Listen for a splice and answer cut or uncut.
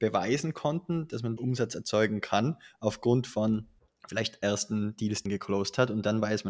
cut